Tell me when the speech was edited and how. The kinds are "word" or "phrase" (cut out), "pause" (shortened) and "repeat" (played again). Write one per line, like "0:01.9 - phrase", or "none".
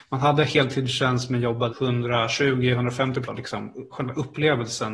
0:01.7 - word
0:03.2 - word
0:03.9 - word